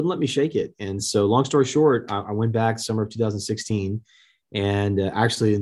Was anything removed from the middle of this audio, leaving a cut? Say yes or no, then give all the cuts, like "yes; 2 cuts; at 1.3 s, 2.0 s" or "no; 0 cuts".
no; 0 cuts